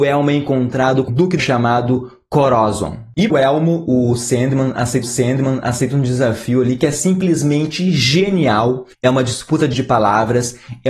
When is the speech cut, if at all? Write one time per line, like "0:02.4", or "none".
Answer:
0:01.1
0:01.4
0:03.3
0:05.0
0:08.9
0:09.7